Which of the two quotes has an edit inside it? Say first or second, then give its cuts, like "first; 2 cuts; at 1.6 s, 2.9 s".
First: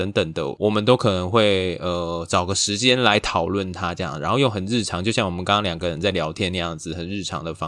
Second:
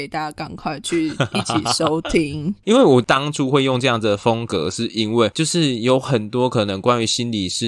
second; 1 cut; at 2.6 s